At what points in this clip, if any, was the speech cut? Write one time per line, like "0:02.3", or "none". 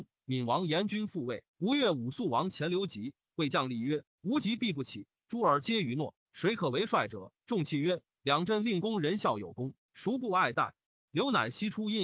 0:01.5
0:07.4